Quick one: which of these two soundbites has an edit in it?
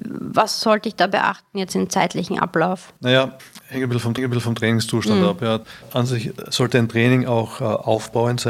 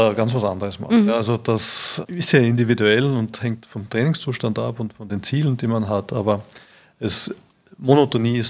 first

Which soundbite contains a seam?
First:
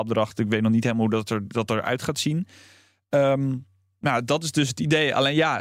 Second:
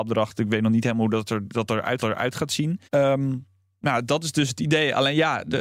second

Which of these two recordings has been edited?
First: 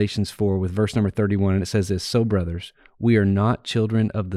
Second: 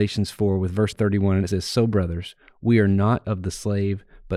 second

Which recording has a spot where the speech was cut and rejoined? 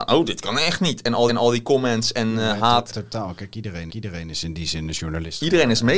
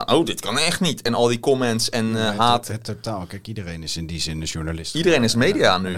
first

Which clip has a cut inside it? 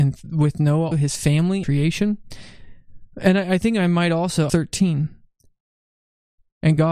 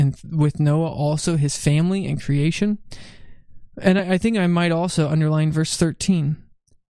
first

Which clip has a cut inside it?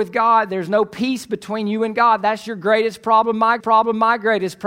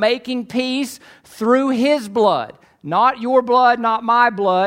first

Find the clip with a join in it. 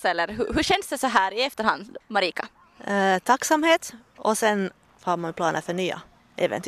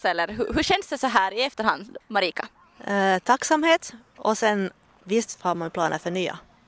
first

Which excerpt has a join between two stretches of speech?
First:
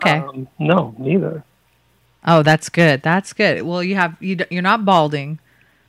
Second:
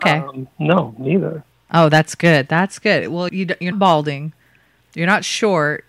second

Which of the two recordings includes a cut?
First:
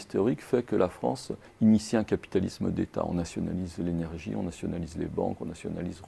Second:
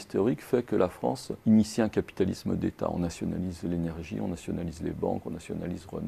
second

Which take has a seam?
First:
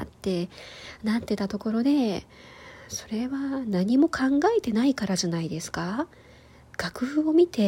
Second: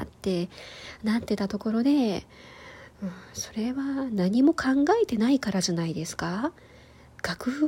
first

